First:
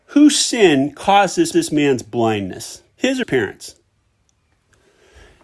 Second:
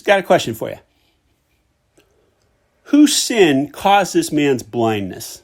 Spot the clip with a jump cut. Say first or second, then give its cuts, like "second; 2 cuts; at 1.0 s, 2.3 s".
first; 3 cuts; at 1.5 s, 2.9 s, 3.2 s